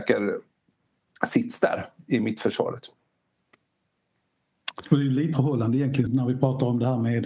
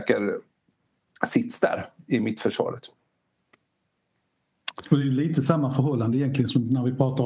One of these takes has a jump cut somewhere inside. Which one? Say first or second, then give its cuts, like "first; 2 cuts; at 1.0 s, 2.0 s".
first; 2 cuts; at 5.3 s, 6.1 s